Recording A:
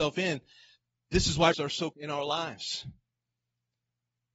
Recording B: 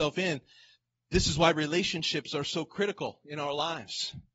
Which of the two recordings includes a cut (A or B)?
A